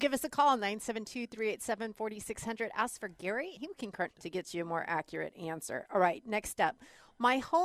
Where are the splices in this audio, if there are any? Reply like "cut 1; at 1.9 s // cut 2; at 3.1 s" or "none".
cut 1; at 3.6 s // cut 2; at 4.1 s